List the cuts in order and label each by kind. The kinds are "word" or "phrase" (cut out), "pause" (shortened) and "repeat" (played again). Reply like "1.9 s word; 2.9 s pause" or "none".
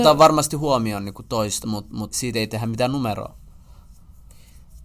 1.6 s word; 2.1 s word